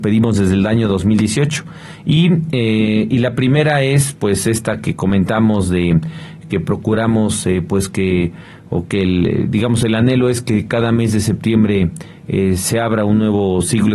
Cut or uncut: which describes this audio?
cut